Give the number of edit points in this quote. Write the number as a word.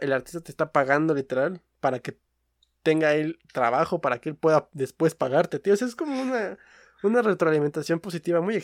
zero